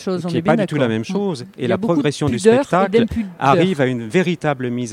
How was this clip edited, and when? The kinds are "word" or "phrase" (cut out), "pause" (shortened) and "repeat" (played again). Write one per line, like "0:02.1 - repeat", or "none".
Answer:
none